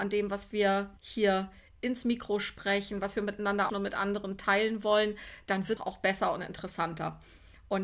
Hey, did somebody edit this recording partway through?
yes; 3 cuts; at 1.0 s, 3.7 s, 5.8 s

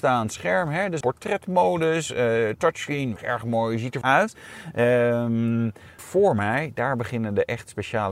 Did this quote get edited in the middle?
yes; 4 cuts; at 1.0 s, 3.2 s, 4.0 s, 6.0 s

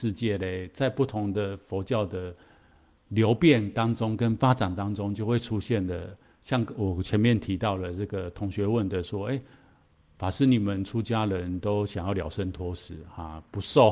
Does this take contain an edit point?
no; 0 cuts

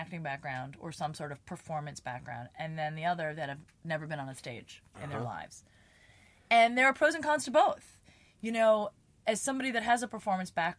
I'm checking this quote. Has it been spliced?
no; 0 cuts

